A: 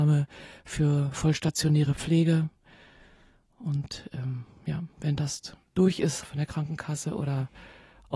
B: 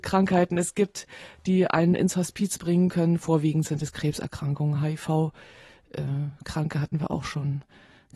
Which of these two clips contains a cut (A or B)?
A